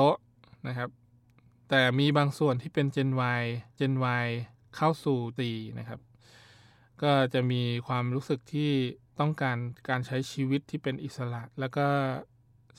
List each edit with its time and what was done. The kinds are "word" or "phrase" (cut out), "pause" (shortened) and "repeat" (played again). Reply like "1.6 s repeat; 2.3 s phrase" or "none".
3.8 s repeat; 5.4 s word; 11.5 s pause